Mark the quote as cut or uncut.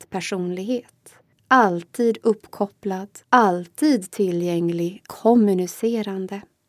cut